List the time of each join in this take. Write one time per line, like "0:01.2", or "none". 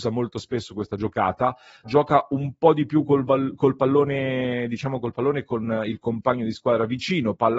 0:01.8